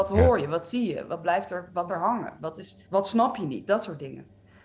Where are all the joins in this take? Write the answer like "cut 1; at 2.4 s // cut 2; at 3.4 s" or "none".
cut 1; at 1.9 s // cut 2; at 2.8 s